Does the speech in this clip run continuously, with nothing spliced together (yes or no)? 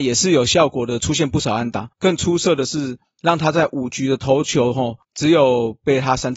no